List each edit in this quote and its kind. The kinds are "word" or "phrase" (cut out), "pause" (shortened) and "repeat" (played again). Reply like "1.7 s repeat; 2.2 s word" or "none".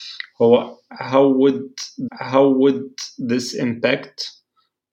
2.1 s repeat